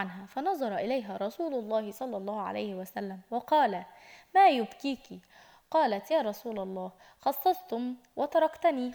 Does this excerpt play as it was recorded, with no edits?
yes; 0 cuts

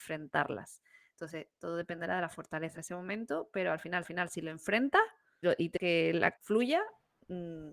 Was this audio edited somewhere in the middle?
yes; 5 cuts; at 2.8 s, 4.0 s, 5.4 s, 5.8 s, 6.4 s

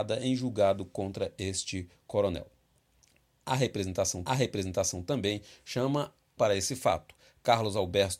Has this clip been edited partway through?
yes; 2 cuts; at 4.3 s, 6.4 s

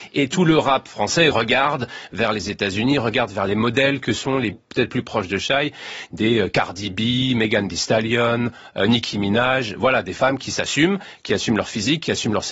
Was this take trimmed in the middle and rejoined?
yes; 2 cuts; at 1.3 s, 4.5 s

